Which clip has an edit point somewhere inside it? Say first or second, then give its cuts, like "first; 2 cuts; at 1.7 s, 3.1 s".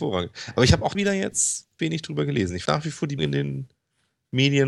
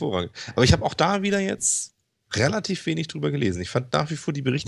first; 4 cuts; at 0.9 s, 1.8 s, 2.7 s, 3.2 s